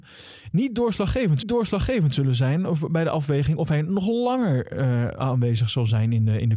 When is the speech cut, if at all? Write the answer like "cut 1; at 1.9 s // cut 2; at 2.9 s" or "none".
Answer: cut 1; at 1.4 s